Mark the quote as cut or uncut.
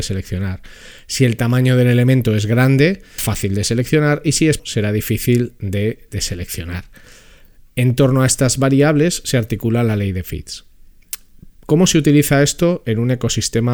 cut